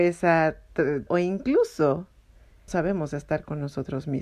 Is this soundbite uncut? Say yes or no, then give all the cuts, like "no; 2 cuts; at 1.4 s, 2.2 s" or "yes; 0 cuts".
no; 2 cuts; at 1.1 s, 2.7 s